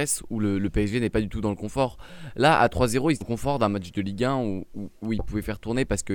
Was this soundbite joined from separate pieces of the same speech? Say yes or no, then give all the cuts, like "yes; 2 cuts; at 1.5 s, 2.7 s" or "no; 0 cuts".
yes; 1 cut; at 3.2 s